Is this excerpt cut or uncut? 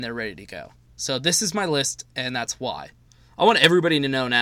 uncut